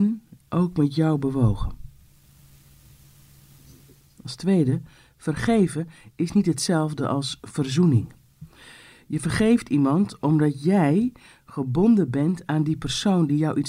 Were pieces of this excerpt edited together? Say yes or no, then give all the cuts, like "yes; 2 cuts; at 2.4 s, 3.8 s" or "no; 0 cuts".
no; 0 cuts